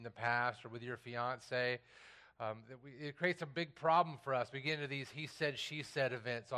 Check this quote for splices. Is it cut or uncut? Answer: uncut